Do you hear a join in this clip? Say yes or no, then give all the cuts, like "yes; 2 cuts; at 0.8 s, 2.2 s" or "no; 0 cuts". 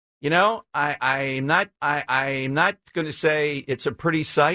yes; 1 cut; at 1.8 s